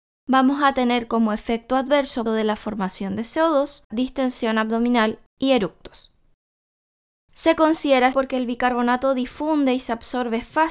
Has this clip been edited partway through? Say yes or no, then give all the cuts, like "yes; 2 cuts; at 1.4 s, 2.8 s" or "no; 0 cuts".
yes; 3 cuts; at 2.3 s, 3.9 s, 8.1 s